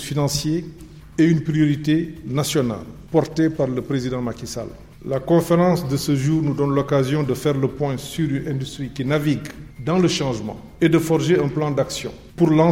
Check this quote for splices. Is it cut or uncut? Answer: uncut